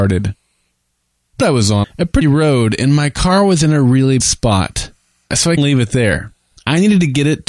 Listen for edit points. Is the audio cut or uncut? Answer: cut